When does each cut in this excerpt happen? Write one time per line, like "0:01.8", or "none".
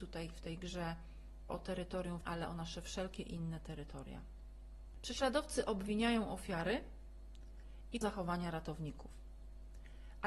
0:01.5
0:02.2
0:08.0